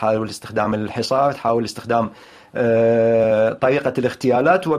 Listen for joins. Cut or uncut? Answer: uncut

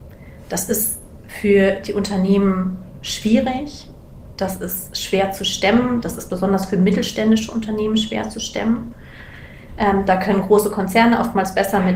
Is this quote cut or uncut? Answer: uncut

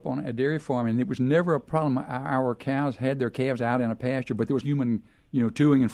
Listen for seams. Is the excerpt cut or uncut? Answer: cut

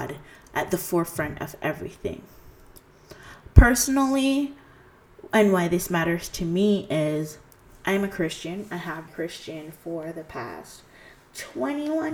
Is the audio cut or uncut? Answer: cut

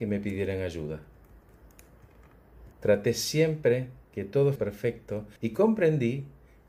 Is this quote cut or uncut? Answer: cut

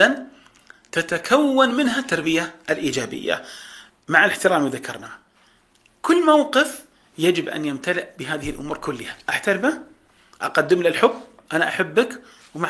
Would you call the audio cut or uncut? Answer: uncut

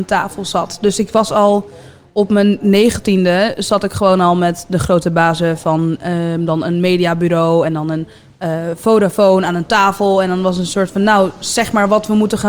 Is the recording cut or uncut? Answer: uncut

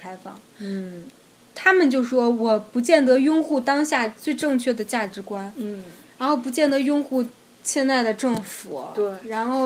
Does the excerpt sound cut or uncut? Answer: uncut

